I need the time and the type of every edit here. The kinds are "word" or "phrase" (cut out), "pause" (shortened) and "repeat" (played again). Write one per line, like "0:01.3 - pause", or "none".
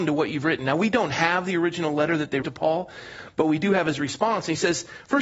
0:02.4 - word